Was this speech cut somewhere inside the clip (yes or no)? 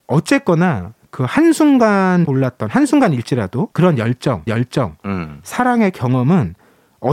yes